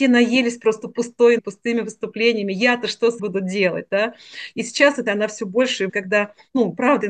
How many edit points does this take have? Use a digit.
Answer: 4